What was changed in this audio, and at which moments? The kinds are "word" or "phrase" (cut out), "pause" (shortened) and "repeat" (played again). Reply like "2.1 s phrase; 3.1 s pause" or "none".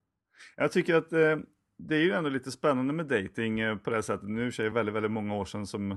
none